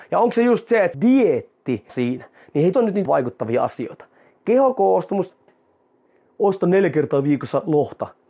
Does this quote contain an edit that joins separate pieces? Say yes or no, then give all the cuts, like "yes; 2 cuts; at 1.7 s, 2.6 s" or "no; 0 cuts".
yes; 5 cuts; at 0.9 s, 1.9 s, 2.7 s, 3.1 s, 5.5 s